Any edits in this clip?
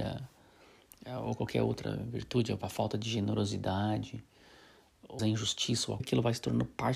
yes; 3 cuts; at 2.6 s, 5.2 s, 6.0 s

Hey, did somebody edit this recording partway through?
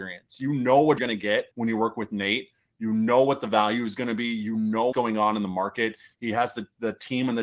yes; 3 cuts; at 1.0 s, 1.5 s, 4.9 s

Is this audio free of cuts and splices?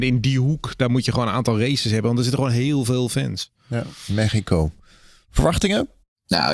yes; 0 cuts

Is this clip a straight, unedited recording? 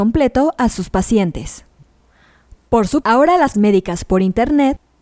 no; 2 cuts; at 3.0 s, 3.5 s

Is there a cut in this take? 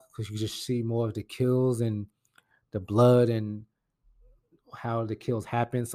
no; 0 cuts

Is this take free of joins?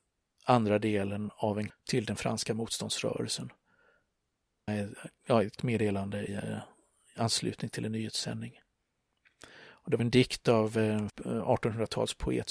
no; 6 cuts; at 1.7 s, 4.7 s, 5.6 s, 6.3 s, 10.0 s, 11.1 s

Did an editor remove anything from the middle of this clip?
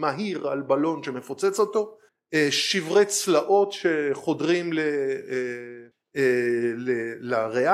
no; 0 cuts

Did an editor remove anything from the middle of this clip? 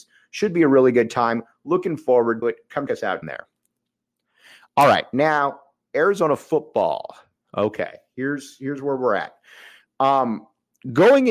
yes; 3 cuts; at 2.4 s, 2.9 s, 3.2 s

